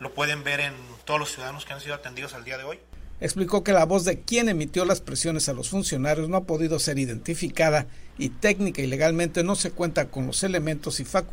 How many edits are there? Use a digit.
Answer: 1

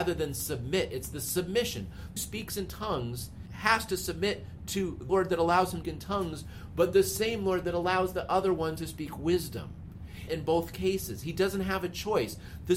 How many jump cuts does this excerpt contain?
4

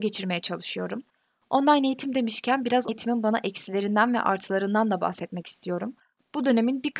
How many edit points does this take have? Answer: 1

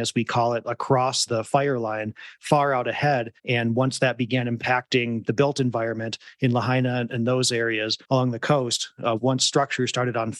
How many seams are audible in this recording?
4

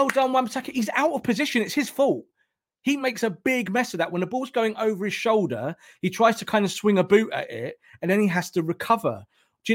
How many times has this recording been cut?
0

